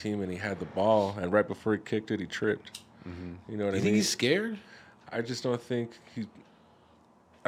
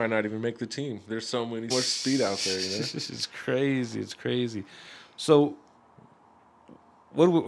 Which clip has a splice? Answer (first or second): second